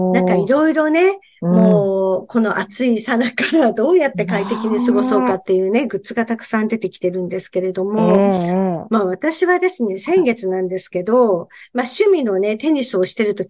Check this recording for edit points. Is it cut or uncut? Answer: uncut